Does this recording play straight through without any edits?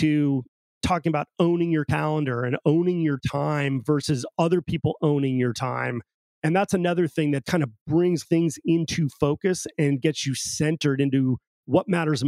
no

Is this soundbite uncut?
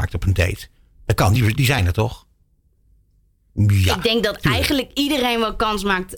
yes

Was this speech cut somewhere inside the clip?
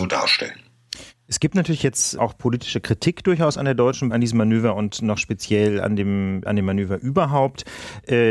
yes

